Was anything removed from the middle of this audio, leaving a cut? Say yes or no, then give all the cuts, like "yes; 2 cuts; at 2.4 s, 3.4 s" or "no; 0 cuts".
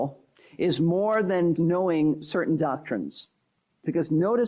yes; 1 cut; at 1.6 s